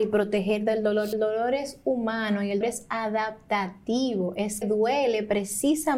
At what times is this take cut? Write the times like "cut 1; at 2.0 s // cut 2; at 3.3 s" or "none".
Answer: cut 1; at 1.1 s // cut 2; at 2.6 s // cut 3; at 4.6 s